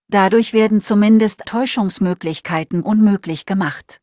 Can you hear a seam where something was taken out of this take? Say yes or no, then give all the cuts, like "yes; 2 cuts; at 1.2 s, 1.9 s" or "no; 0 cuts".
yes; 2 cuts; at 1.4 s, 2.8 s